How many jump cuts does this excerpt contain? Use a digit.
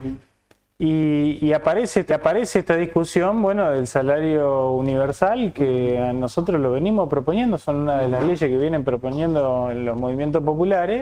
1